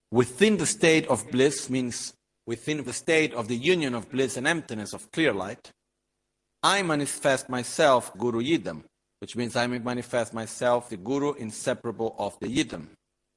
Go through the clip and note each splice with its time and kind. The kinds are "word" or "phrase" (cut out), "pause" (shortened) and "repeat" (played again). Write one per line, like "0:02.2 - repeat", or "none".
0:01.3 - word
0:01.7 - word
0:02.9 - word
0:04.1 - word
0:08.1 - word
0:10.9 - word